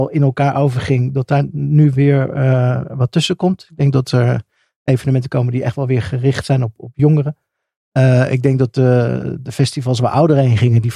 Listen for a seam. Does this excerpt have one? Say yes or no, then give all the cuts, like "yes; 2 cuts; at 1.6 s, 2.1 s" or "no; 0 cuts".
no; 0 cuts